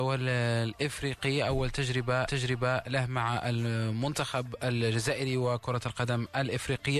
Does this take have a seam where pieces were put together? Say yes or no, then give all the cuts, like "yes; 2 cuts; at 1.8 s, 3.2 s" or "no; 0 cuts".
yes; 1 cut; at 2.2 s